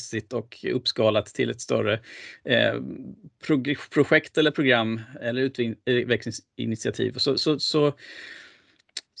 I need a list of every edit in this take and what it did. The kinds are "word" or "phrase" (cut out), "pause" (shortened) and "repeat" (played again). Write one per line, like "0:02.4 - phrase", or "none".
none